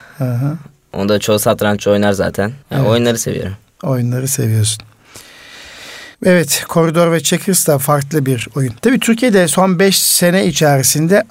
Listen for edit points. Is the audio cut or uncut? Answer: cut